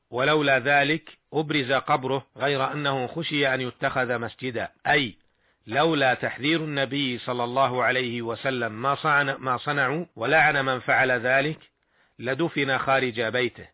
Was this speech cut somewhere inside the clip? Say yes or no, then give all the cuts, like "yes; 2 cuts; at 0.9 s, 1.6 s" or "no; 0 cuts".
yes; 3 cuts; at 2.3 s, 4.8 s, 10.1 s